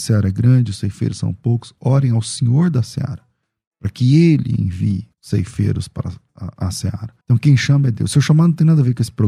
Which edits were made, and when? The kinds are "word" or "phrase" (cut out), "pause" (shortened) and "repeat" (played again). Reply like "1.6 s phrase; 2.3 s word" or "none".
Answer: 5.1 s pause; 7.2 s pause